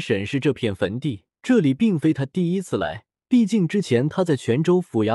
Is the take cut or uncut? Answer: cut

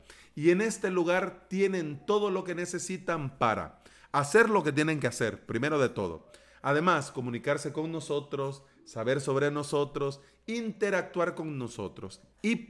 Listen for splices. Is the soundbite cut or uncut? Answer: uncut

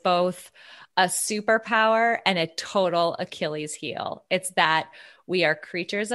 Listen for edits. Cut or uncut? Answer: uncut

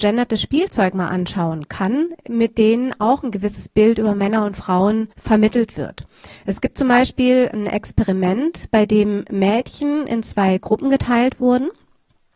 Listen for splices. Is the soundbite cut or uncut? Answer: cut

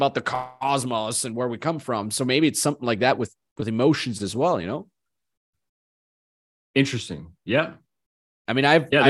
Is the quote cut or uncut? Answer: uncut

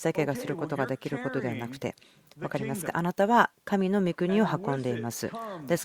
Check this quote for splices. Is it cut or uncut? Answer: uncut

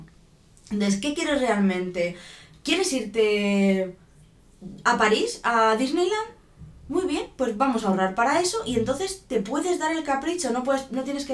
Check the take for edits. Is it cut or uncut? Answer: uncut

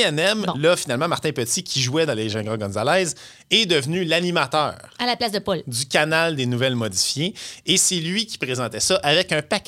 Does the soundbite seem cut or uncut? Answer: uncut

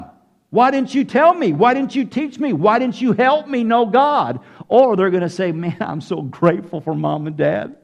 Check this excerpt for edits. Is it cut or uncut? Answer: uncut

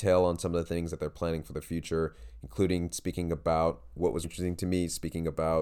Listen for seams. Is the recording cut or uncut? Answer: cut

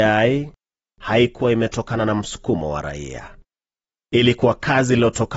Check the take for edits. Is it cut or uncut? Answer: uncut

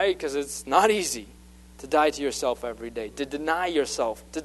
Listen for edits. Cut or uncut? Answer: uncut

